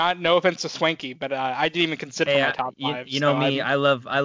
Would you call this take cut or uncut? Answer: cut